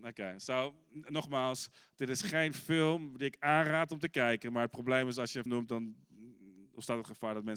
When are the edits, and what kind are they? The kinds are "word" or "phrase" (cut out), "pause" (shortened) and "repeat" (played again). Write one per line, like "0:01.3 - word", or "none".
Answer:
0:05.5 - word